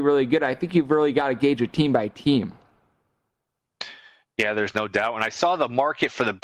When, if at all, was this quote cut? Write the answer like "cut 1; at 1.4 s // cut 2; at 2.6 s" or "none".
none